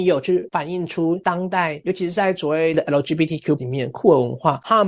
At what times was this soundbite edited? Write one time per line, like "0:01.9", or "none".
0:03.6